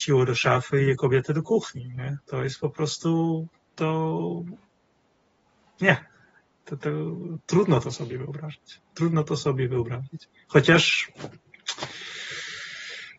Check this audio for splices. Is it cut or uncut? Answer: uncut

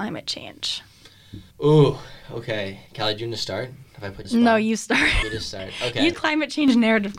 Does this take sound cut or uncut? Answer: cut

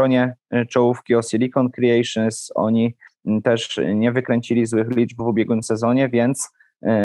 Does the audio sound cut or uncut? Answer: uncut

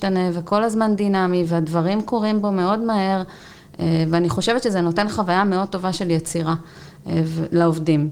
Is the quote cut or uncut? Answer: uncut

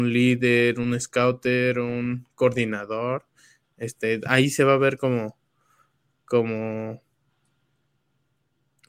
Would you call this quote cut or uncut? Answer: uncut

